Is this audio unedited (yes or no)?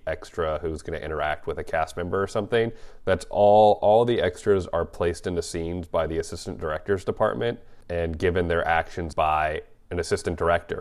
yes